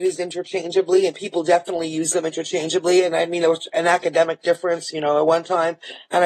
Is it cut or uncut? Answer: uncut